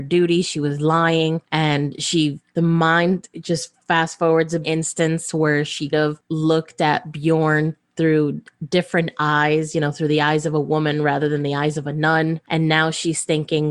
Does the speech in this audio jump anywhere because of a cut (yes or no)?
yes